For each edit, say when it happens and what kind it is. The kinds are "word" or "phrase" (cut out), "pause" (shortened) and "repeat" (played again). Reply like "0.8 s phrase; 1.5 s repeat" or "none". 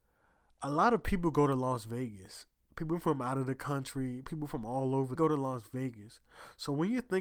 5.2 s phrase